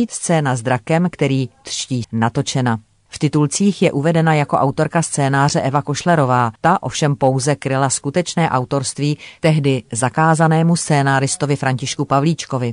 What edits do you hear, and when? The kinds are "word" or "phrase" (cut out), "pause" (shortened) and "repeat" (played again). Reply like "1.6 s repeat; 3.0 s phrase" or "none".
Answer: 2.0 s word; 6.6 s pause